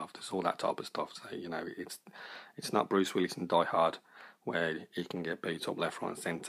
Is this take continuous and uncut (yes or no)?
yes